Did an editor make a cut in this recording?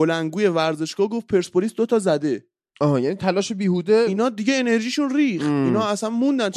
no; 0 cuts

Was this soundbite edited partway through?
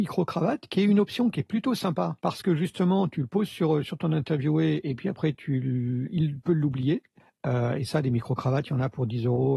yes; 2 cuts; at 2.2 s, 7.2 s

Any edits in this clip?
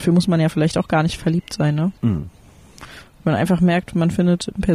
yes; 1 cut; at 2.0 s

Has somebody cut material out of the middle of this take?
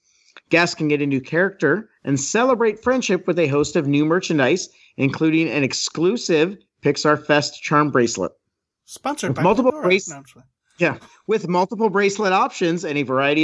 no; 0 cuts

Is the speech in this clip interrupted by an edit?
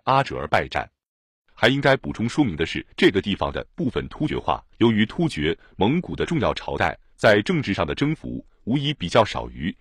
yes; 2 cuts; at 2.9 s, 4.7 s

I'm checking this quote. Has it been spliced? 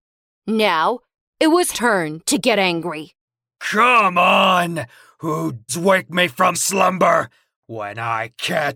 yes; 3 cuts; at 1.7 s, 5.7 s, 6.5 s

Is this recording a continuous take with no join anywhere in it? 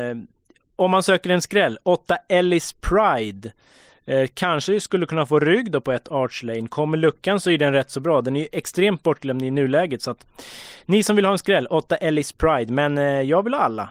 yes; 0 cuts

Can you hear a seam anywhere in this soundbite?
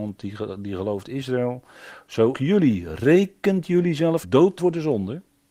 yes; 4 cuts; at 1.0 s, 2.3 s, 4.2 s, 4.6 s

